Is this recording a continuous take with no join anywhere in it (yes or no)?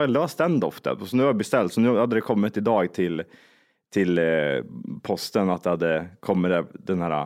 yes